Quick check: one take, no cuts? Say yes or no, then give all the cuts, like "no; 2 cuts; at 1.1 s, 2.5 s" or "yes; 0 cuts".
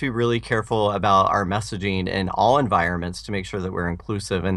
yes; 0 cuts